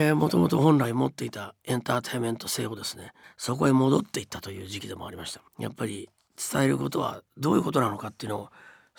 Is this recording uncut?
no; 2 cuts; at 3.2 s, 5.5 s

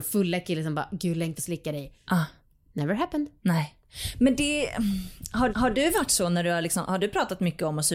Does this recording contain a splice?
yes; 2 cuts; at 1.4 s, 5.5 s

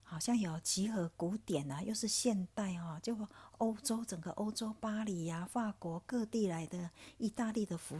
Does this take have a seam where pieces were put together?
no; 0 cuts

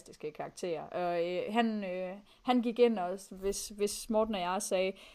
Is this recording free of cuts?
yes; 0 cuts

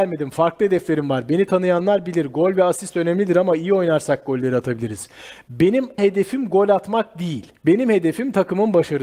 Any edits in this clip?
yes; 2 cuts; at 6.0 s, 7.6 s

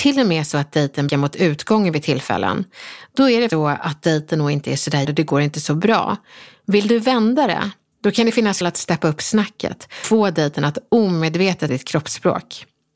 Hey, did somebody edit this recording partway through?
yes; 6 cuts; at 1.1 s, 3.5 s, 5.0 s, 8.6 s, 10.0 s, 11.7 s

